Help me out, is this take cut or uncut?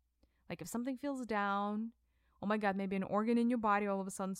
uncut